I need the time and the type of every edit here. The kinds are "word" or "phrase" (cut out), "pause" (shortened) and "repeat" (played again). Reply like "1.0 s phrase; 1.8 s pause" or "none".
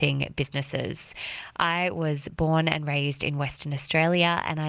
none